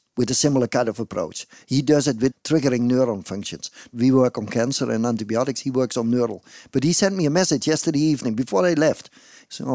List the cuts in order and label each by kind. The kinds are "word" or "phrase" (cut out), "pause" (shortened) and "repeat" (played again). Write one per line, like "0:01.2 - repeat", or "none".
none